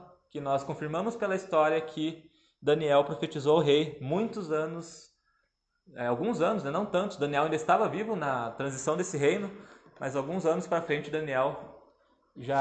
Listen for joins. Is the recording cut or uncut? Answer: uncut